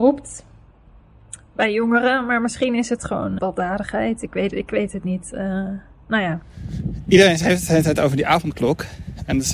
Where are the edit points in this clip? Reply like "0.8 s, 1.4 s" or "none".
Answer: 3.4 s